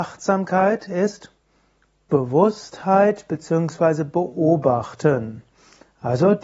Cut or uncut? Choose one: uncut